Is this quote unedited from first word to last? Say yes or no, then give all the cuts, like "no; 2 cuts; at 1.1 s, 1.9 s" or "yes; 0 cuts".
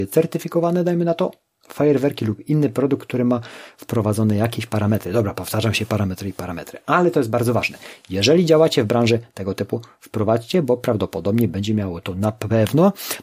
yes; 0 cuts